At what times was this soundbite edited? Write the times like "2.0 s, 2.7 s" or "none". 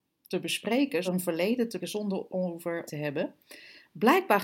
1.0 s, 1.8 s, 2.3 s, 2.9 s